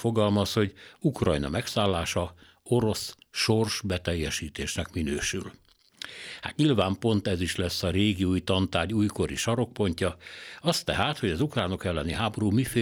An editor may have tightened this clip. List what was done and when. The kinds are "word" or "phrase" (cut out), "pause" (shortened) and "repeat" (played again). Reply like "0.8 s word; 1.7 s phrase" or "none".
none